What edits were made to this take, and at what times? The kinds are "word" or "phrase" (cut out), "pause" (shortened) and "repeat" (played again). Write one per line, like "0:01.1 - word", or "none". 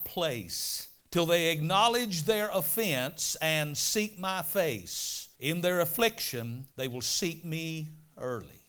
0:01.0 - pause
0:05.3 - pause
0:06.7 - pause

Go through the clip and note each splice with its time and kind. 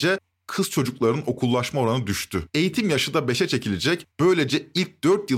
0:02.5 - pause
0:04.1 - pause

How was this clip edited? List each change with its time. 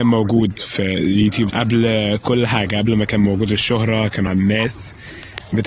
0:01.5 - word
0:04.3 - word

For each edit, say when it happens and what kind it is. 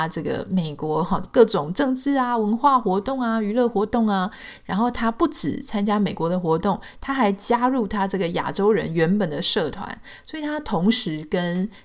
0:01.2 - phrase

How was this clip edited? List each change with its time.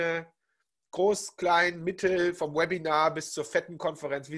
none

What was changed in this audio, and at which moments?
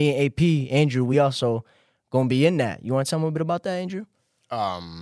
none

